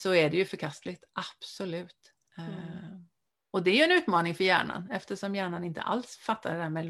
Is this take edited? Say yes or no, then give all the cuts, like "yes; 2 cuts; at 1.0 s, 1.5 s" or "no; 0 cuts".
no; 0 cuts